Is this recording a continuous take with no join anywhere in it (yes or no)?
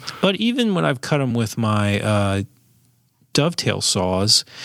yes